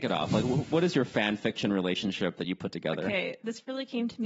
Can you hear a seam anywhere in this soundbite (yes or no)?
no